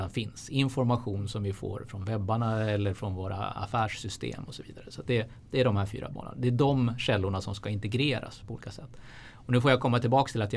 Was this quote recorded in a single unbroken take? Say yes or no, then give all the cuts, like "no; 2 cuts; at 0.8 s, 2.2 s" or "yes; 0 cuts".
yes; 0 cuts